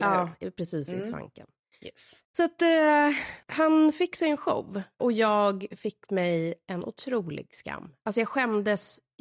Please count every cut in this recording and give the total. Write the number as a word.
two